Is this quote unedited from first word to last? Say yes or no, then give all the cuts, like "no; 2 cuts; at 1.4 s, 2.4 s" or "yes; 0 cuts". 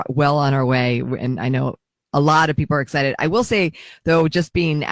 yes; 0 cuts